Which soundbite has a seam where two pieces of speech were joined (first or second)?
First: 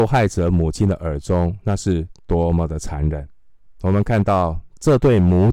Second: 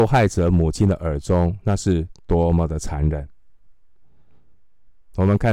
first